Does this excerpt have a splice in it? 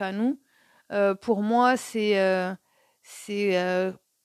no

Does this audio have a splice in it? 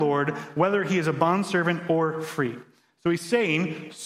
no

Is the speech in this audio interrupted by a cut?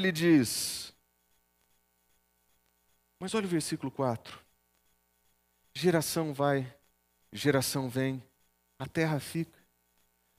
no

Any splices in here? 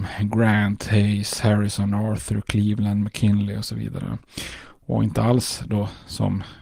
no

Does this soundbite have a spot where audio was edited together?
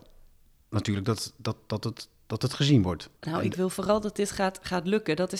yes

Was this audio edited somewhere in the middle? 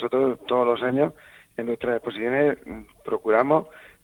no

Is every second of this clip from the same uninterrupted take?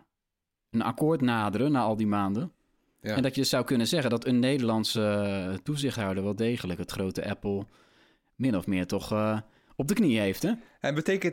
yes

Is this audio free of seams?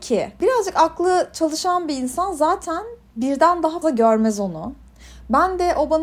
no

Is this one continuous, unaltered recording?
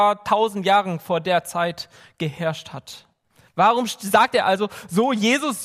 yes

